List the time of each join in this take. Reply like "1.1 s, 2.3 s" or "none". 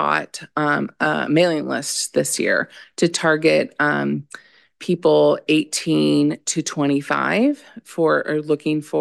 none